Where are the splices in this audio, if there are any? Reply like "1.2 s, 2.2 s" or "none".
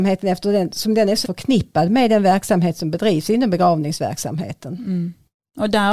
1.2 s